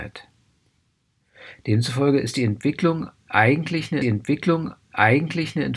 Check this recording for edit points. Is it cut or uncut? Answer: cut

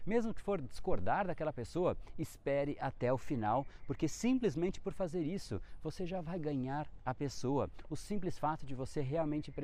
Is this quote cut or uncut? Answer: uncut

